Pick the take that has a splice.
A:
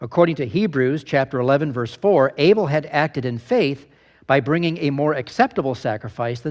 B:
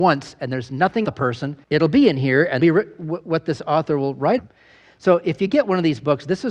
B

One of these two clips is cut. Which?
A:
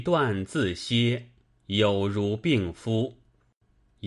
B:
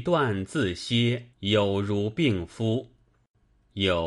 B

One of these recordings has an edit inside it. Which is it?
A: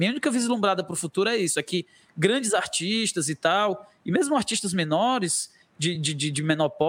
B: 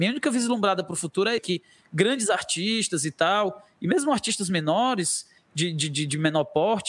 B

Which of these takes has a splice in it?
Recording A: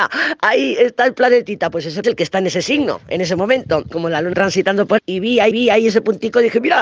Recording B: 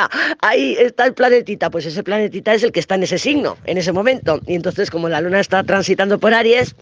A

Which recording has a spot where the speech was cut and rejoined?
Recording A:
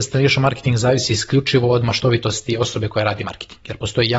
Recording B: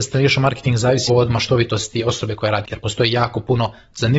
B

